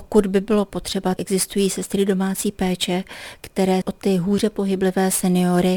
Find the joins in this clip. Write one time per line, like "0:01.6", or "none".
0:01.2
0:03.8

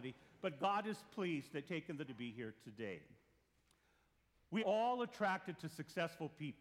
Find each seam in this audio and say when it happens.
0:01.6
0:02.1
0:04.6

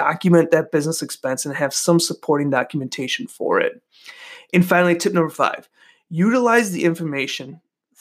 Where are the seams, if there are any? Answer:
none

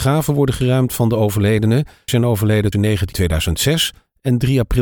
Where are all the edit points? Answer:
0:02.1
0:02.7
0:03.1

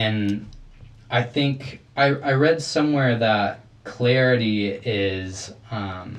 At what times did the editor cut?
none

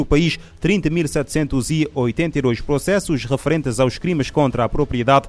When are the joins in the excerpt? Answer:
none

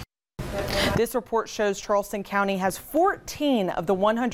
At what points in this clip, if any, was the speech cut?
none

